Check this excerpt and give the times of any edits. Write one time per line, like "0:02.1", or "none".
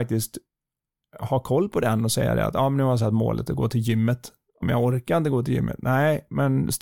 0:04.6